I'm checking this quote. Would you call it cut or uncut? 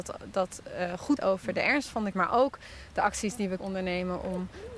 cut